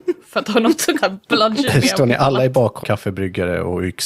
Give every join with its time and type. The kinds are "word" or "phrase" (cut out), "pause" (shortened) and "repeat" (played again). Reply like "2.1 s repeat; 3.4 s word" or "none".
1.0 s word; 2.8 s word